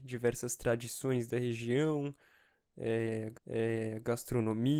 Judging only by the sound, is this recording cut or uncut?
cut